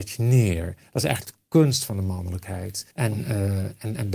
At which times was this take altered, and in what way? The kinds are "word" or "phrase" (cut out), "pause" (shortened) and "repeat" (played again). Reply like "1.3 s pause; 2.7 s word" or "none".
2.9 s pause